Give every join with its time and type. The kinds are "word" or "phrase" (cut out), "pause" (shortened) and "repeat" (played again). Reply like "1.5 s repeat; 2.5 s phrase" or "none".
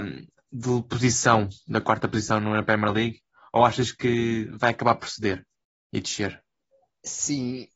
none